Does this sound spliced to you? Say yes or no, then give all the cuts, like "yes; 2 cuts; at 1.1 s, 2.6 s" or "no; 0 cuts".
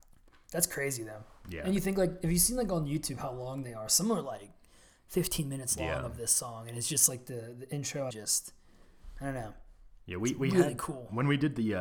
yes; 1 cut; at 8.1 s